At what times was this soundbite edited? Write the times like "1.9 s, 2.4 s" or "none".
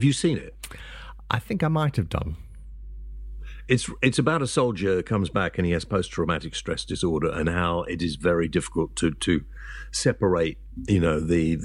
none